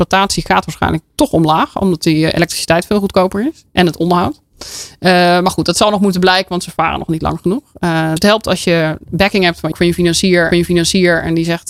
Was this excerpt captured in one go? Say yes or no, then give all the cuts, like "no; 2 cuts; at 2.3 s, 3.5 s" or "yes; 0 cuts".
no; 5 cuts; at 2.3 s, 3.7 s, 8.2 s, 9.7 s, 10.5 s